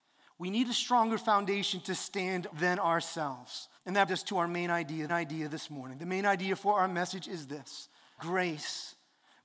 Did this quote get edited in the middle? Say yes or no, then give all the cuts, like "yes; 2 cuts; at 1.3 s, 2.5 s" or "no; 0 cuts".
yes; 5 cuts; at 2.5 s, 3.8 s, 4.1 s, 5.1 s, 8.2 s